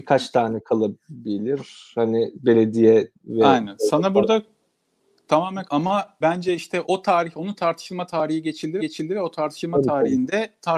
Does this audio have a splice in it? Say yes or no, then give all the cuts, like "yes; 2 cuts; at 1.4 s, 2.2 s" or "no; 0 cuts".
yes; 5 cuts; at 3.1 s, 5.7 s, 6.2 s, 6.8 s, 8.8 s